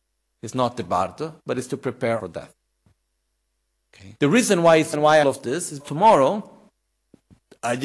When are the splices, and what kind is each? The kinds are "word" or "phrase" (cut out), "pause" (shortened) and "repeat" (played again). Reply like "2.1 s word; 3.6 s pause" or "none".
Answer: 2.2 s word; 4.2 s pause; 4.9 s word; 5.2 s phrase; 5.8 s word